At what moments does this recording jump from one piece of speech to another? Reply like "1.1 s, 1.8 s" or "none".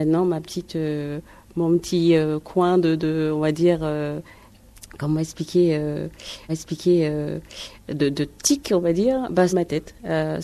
6.5 s, 9.5 s